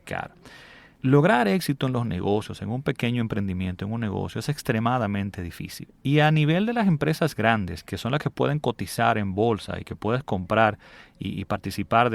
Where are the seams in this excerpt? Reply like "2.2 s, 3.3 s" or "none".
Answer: none